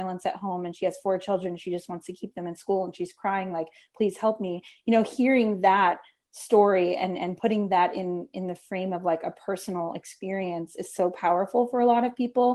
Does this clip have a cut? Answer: no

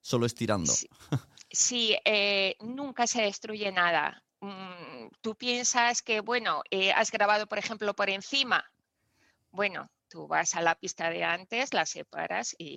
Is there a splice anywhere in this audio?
no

